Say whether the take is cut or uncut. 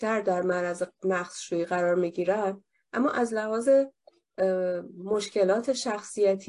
uncut